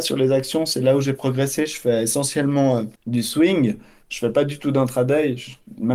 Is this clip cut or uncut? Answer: cut